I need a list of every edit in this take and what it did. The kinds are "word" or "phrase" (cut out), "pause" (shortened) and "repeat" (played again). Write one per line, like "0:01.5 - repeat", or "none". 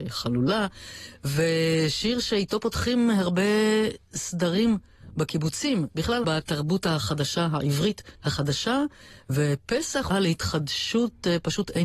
0:06.2 - phrase
0:08.1 - pause
0:10.1 - phrase

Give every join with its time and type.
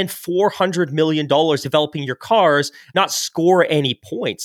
0:01.6 - word
0:02.9 - word

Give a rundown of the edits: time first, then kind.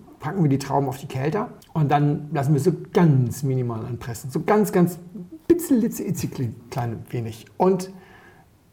0:01.6 - pause

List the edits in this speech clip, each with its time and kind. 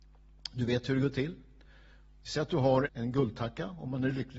0:02.9 - word

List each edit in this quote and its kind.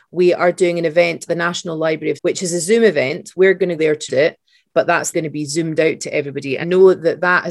0:01.3 - word
0:02.2 - word
0:03.8 - word
0:04.1 - word
0:05.1 - word
0:06.6 - word

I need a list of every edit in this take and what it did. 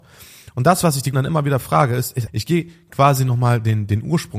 0:01.1 - word
0:02.3 - word

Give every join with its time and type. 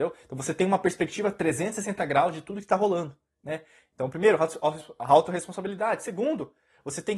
none

